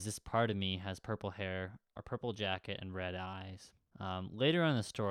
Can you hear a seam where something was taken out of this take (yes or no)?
no